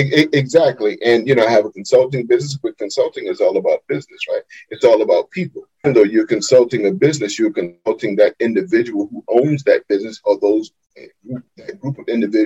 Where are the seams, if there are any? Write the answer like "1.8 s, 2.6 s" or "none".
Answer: 5.8 s